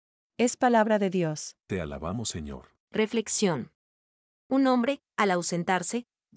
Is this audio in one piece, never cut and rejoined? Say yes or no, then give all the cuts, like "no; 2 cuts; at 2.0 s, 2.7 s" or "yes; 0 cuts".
no; 2 cuts; at 1.6 s, 2.8 s